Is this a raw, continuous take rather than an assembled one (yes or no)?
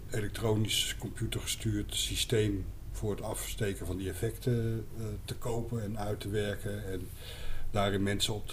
yes